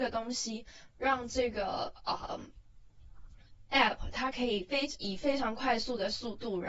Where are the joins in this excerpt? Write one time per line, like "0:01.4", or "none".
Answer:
none